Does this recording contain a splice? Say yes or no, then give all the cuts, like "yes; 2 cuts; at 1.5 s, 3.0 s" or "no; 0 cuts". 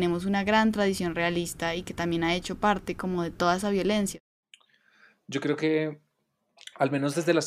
no; 0 cuts